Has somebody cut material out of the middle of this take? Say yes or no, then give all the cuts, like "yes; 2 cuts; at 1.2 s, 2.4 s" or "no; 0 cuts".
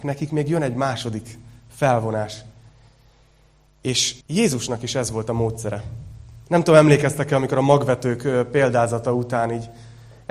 yes; 2 cuts; at 4.2 s, 6.4 s